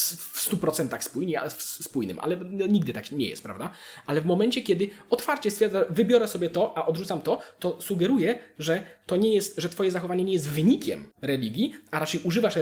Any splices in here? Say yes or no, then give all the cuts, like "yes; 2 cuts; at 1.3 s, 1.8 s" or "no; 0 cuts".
yes; 1 cut; at 11.1 s